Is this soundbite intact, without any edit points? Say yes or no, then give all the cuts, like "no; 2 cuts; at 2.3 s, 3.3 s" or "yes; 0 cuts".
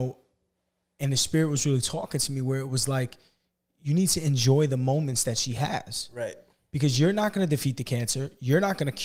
yes; 0 cuts